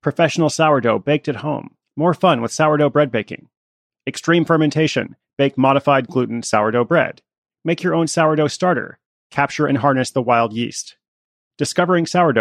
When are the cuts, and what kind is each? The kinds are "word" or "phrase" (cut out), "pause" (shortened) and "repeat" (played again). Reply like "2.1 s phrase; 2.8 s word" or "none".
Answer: none

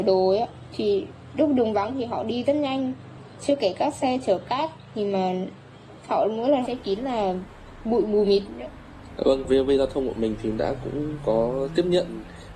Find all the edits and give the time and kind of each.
6.6 s phrase

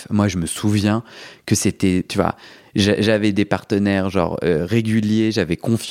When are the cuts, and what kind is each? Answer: none

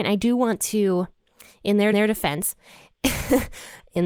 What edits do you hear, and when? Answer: 1.9 s repeat

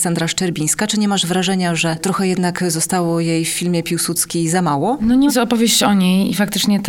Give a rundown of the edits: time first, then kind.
5.3 s phrase

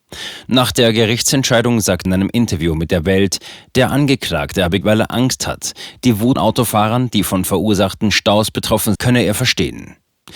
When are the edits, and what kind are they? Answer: 2.0 s word; 4.8 s word; 6.3 s word; 8.9 s word

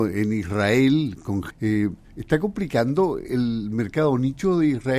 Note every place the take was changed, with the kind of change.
1.5 s word

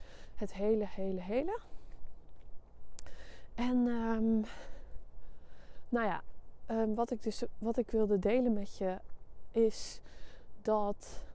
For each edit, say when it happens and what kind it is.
none

